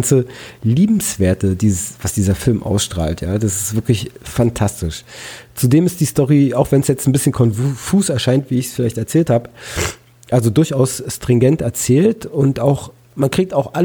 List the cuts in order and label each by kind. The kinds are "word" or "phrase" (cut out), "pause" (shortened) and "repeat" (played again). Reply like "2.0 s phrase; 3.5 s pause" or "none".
none